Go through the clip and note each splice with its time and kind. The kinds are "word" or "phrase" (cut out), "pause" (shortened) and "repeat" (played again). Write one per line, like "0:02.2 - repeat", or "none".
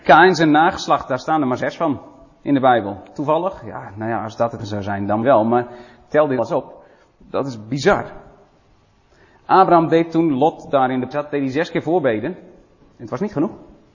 0:04.6 - word
0:05.2 - word
0:06.4 - word
0:11.1 - word